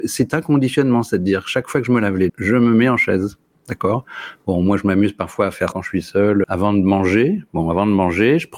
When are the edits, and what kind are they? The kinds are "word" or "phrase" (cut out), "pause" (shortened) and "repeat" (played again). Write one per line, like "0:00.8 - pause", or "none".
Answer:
0:02.3 - word
0:05.7 - word
0:06.4 - word